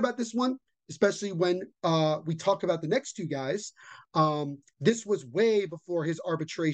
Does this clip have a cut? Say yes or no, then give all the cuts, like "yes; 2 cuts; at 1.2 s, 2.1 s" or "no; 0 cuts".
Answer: no; 0 cuts